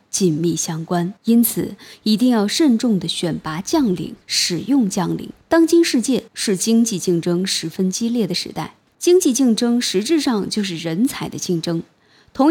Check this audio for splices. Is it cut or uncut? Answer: cut